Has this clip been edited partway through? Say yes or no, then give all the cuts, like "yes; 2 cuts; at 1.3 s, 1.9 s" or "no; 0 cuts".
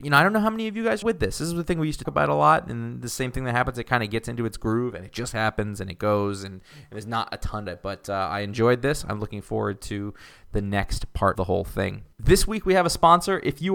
yes; 5 cuts; at 1.0 s, 2.0 s, 7.7 s, 11.3 s, 12.1 s